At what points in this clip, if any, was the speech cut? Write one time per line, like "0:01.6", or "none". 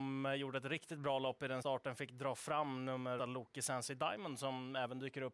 0:01.6
0:03.2